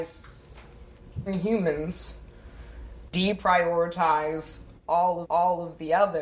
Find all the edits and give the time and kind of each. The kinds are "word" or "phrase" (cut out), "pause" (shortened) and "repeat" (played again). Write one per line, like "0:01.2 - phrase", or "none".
0:01.3 - word
0:03.1 - word
0:05.2 - repeat